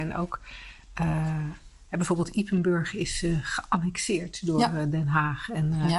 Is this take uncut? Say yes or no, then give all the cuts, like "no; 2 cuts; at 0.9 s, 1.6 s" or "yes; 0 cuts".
yes; 0 cuts